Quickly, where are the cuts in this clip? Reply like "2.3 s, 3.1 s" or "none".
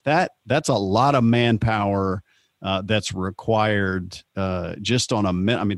none